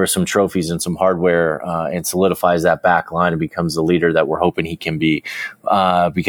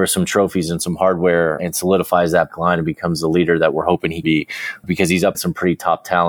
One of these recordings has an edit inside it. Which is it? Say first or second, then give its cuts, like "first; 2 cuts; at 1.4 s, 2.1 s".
second; 5 cuts; at 1.6 s, 2.5 s, 4.2 s, 4.8 s, 5.3 s